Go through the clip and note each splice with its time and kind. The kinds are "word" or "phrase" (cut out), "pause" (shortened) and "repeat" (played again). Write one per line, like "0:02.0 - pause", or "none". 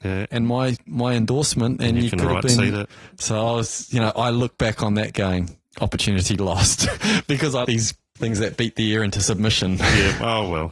0:07.6 - word